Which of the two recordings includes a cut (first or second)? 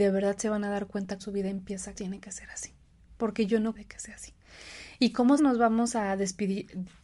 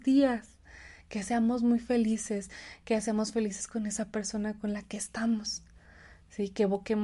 first